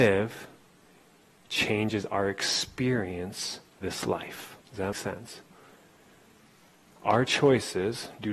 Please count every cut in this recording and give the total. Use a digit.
3